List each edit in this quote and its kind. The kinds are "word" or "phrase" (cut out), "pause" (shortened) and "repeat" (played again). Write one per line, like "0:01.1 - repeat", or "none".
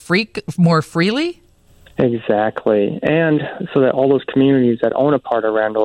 0:01.7 - pause